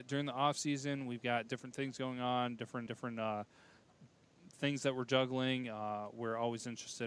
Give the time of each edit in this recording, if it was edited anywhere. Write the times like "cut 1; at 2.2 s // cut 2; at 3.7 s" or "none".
cut 1; at 2.9 s